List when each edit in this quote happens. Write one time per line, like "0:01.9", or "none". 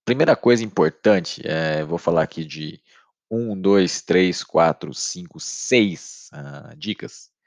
none